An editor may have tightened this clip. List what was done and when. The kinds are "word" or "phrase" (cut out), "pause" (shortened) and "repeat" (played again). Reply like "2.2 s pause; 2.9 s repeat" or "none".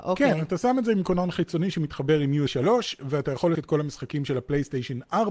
2.5 s word; 3.5 s word